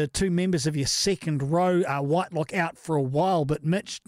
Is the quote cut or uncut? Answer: uncut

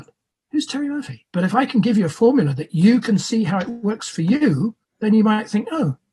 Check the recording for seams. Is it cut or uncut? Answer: cut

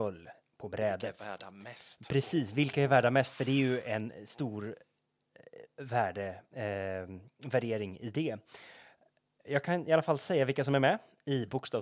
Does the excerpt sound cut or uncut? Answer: uncut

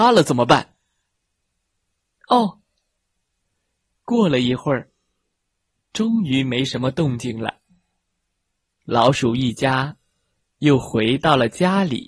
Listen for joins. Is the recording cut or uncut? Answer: uncut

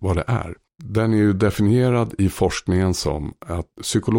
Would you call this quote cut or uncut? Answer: uncut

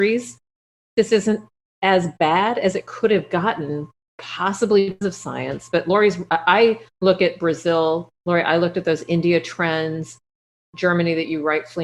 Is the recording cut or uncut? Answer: cut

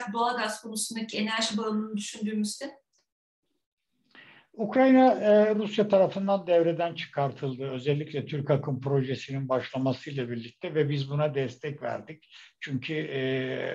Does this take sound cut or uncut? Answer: uncut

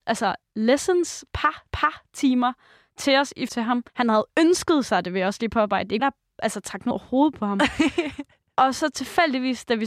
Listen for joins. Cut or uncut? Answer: cut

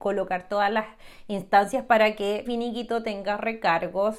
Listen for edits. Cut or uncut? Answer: cut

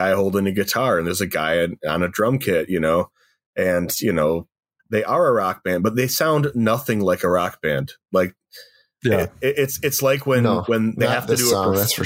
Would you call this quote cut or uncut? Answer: cut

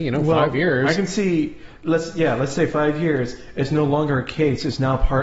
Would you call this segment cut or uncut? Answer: uncut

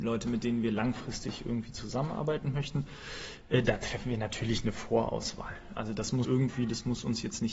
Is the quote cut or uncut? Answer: cut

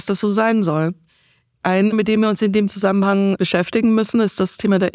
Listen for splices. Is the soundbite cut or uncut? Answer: cut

